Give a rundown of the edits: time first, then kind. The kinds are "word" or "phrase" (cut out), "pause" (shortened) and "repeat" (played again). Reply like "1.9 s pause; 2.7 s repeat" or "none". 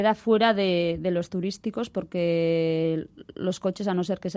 1.3 s word